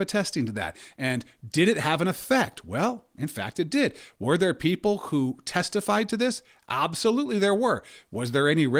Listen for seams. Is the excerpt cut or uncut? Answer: uncut